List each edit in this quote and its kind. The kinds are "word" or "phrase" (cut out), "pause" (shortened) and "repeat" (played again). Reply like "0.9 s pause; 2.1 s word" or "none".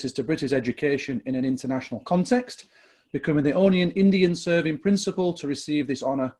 none